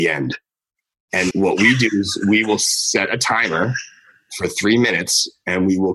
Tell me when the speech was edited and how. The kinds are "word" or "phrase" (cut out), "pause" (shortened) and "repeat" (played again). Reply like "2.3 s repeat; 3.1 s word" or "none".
1.3 s word